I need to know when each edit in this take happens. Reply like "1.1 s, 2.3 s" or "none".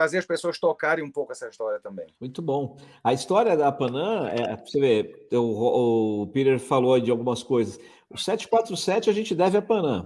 2.1 s

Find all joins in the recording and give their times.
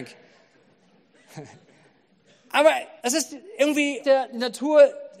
3.0 s, 4.0 s

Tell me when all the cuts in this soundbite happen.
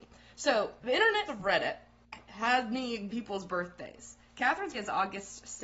1.3 s, 3.1 s, 4.7 s

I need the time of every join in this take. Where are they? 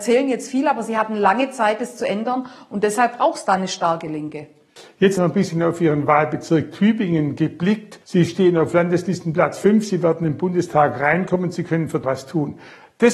5.2 s, 8.0 s, 12.0 s

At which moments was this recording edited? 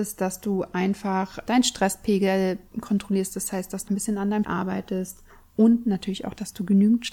3.9 s, 4.4 s, 5.3 s

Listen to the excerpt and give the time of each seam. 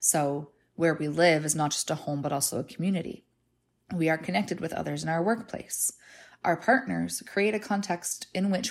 none

